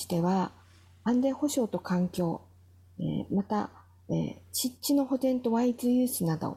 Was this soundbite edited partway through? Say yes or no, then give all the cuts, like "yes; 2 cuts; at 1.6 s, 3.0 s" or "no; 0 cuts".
no; 0 cuts